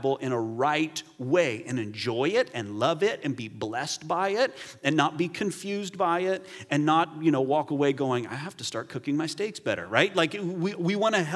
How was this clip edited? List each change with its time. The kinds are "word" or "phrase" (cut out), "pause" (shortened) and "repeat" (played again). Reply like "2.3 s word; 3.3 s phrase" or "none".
none